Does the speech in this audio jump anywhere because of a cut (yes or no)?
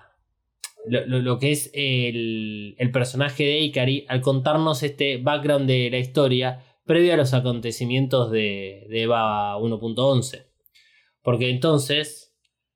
no